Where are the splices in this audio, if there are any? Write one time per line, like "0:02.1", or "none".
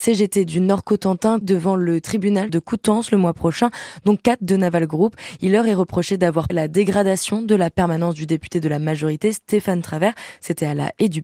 0:01.4
0:02.5
0:06.5

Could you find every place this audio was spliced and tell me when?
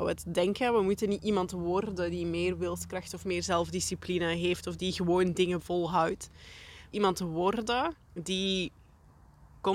0:05.6
0:06.9
0:08.0

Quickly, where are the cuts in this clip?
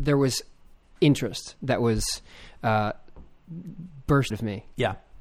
0:04.3

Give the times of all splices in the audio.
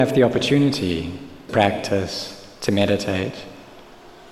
0:01.5

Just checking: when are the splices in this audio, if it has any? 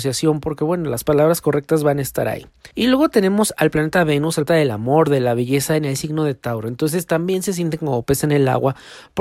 0:02.7
0:04.5

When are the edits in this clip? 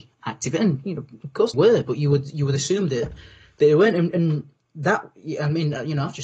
0:01.5

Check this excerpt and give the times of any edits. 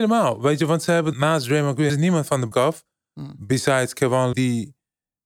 0:01.1
0:01.9
0:02.5
0:04.3

